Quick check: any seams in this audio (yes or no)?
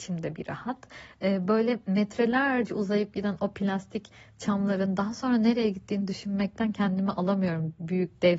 no